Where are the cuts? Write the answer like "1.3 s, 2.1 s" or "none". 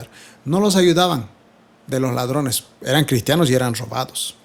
none